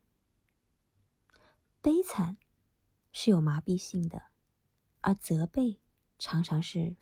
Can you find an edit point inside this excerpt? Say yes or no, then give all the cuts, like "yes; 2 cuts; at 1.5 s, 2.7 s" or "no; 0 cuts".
no; 0 cuts